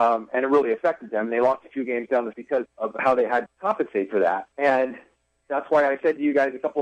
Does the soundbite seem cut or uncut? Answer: cut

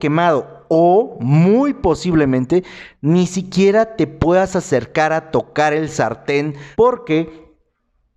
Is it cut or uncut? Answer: cut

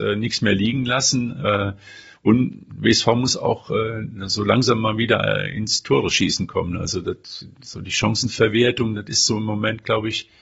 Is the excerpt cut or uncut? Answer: uncut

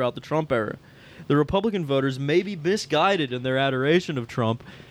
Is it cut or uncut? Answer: uncut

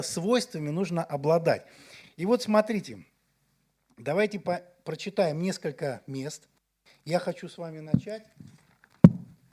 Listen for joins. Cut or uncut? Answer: uncut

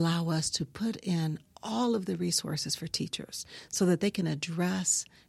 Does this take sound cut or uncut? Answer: uncut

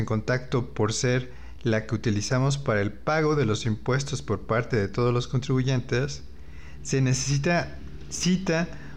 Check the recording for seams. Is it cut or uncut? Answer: uncut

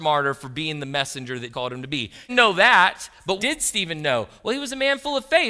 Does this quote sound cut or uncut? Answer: cut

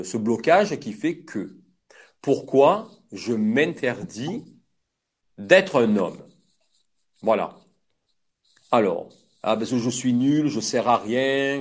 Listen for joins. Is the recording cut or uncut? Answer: uncut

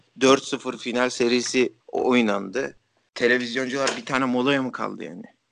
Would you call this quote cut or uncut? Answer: cut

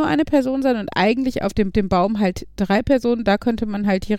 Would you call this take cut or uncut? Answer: cut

